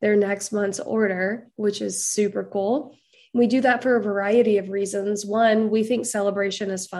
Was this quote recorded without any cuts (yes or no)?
yes